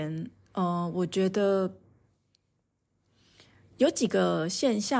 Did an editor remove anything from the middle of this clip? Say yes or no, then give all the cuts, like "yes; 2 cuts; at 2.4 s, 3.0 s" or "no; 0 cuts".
no; 0 cuts